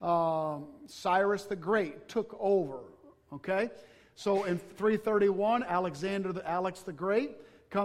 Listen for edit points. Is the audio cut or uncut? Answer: uncut